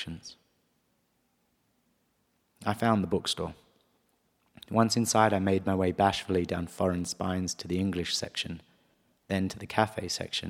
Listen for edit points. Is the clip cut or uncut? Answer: uncut